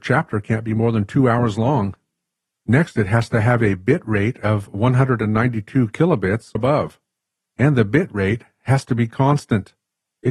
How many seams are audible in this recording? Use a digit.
1